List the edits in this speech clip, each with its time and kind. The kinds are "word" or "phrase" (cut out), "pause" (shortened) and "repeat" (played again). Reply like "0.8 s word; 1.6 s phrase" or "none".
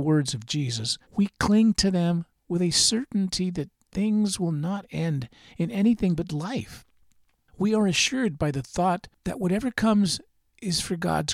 1.0 s pause